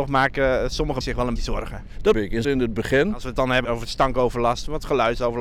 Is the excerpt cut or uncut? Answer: cut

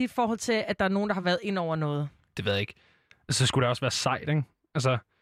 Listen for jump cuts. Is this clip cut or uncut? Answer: uncut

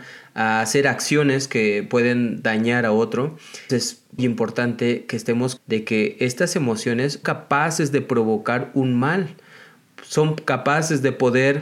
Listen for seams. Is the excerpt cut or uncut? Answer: cut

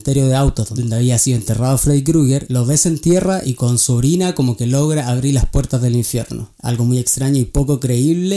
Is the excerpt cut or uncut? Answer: uncut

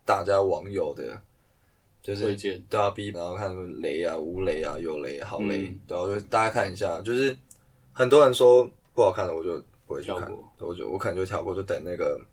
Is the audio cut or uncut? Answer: cut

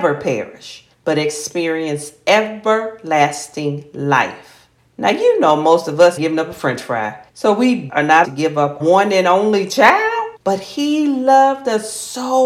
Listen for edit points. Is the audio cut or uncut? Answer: cut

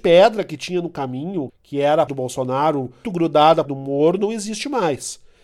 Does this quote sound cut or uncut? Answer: cut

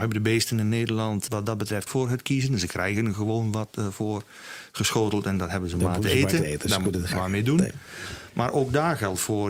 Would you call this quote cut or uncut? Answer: cut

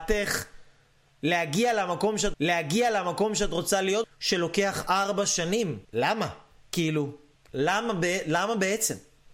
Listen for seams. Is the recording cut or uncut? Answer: cut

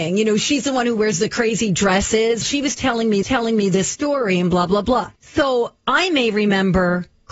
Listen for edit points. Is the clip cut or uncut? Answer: cut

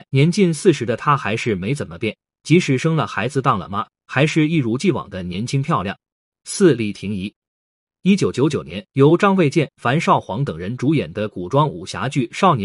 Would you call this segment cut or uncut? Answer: cut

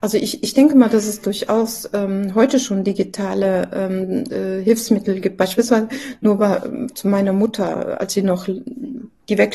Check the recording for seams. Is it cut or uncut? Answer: uncut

